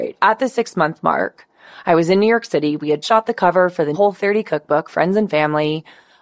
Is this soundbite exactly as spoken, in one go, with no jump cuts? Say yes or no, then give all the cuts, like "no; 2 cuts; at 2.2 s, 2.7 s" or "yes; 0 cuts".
no; 2 cuts; at 3.0 s, 3.9 s